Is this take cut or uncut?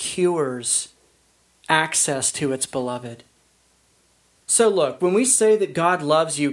uncut